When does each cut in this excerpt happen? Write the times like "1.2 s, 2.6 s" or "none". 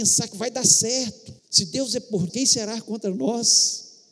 1.4 s, 2.3 s